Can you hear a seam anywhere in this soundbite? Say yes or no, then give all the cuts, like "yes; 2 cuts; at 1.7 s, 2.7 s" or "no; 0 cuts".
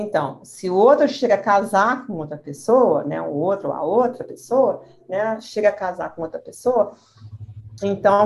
no; 0 cuts